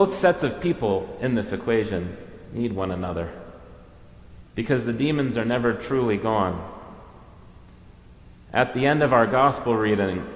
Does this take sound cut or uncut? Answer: uncut